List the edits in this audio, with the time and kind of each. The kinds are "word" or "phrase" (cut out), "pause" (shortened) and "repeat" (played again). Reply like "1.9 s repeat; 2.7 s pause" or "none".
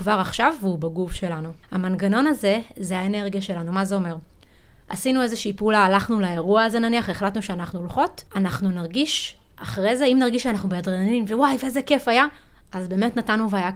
1.6 s pause; 8.3 s pause